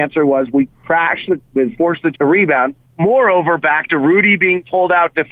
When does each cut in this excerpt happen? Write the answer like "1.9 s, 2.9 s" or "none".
1.4 s, 1.8 s, 2.1 s

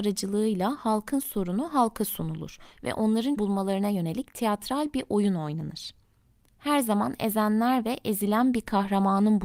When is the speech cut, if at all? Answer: 3.4 s

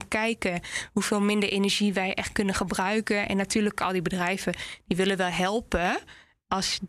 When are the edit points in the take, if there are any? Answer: none

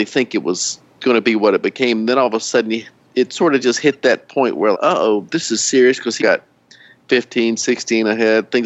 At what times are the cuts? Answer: 4.7 s, 6.2 s

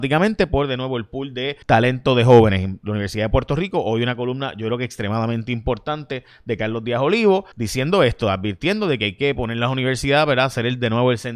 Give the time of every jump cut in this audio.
1.6 s, 7.5 s

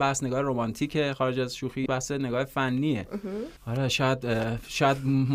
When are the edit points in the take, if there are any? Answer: 1.9 s, 3.6 s

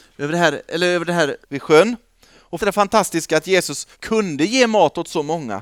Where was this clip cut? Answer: 1.4 s, 2.6 s, 3.9 s

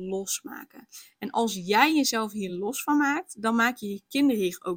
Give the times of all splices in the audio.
none

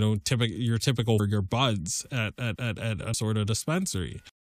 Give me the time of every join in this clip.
1.2 s, 2.6 s, 3.1 s

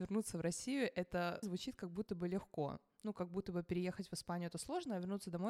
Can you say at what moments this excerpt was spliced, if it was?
1.4 s

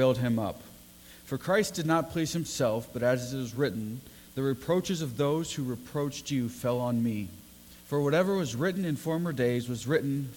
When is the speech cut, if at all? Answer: 7.8 s

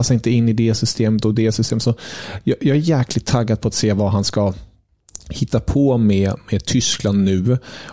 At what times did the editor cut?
none

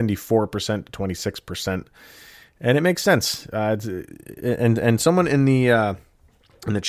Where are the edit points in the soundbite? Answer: none

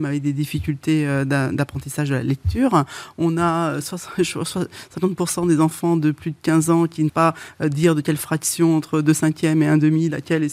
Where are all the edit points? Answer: 7.1 s

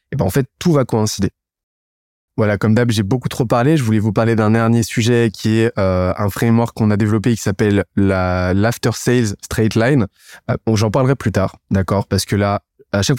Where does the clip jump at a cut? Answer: none

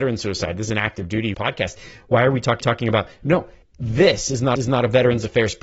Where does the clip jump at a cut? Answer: 1.3 s, 2.6 s, 3.6 s, 4.6 s

